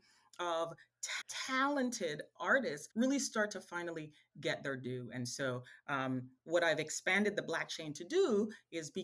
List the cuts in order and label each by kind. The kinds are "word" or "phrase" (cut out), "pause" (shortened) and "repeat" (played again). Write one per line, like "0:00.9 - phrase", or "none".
0:01.2 - word
0:02.9 - pause
0:06.4 - pause